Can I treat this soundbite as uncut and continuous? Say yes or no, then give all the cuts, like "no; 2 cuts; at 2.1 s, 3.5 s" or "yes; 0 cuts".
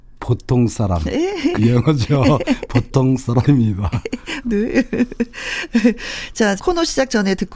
no; 3 cuts; at 1.6 s, 4.4 s, 6.6 s